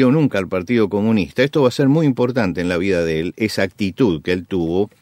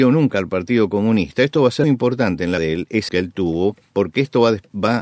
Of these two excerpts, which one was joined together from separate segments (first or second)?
second